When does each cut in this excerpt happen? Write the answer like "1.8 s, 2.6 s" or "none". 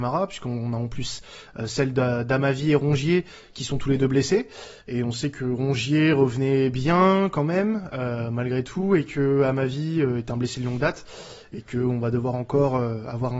4.8 s